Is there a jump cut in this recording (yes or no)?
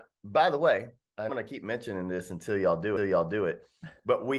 yes